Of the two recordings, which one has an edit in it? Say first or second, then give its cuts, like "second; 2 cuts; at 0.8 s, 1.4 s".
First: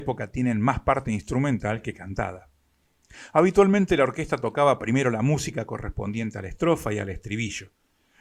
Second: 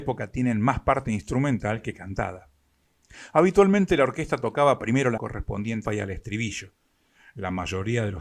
second; 2 cuts; at 5.2 s, 5.9 s